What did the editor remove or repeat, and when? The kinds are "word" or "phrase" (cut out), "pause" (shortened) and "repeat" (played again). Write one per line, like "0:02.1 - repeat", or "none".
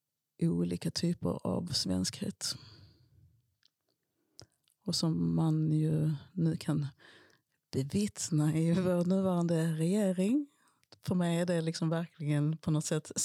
none